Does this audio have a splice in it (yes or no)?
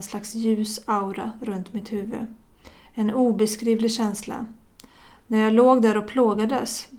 no